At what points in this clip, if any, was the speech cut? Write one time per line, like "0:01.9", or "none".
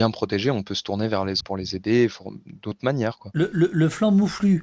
0:01.4